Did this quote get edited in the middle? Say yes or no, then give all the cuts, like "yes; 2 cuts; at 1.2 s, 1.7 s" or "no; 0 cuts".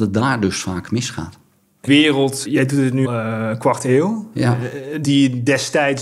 yes; 4 cuts; at 1.9 s, 2.4 s, 3.0 s, 5.0 s